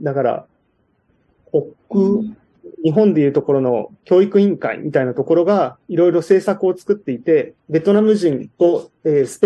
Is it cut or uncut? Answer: cut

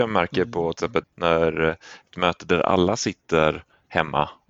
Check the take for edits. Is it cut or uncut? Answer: cut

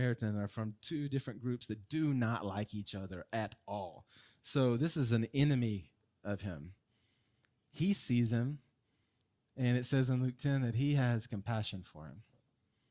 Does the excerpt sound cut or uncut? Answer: uncut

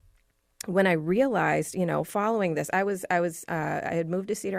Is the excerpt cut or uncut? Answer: uncut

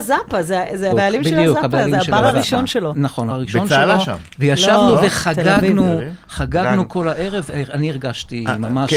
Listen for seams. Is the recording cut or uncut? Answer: cut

